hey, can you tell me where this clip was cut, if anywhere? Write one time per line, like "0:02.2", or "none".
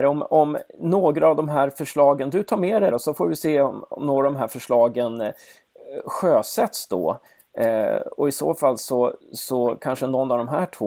0:02.9
0:09.2